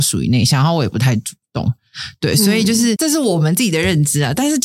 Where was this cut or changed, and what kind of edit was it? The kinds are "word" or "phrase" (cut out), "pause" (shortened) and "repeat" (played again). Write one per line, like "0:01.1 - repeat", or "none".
0:03.0 - word